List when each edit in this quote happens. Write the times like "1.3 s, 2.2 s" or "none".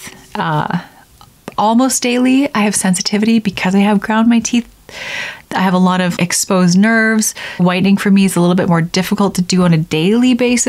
6.2 s, 7.6 s